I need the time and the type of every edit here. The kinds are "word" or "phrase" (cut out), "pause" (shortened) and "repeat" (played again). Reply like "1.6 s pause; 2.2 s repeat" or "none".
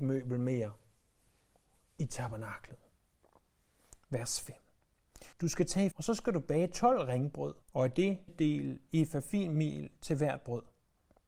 5.3 s pause; 5.9 s phrase; 7.6 s pause; 8.3 s phrase